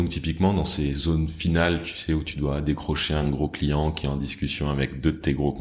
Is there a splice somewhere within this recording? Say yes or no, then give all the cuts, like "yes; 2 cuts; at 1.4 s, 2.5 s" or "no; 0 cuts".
no; 0 cuts